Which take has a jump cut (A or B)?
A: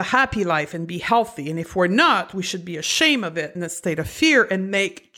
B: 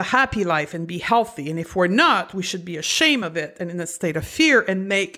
A